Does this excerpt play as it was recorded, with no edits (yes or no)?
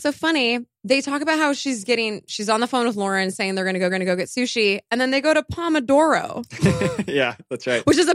no